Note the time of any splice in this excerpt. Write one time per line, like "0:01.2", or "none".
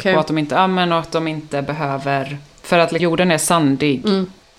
0:03.0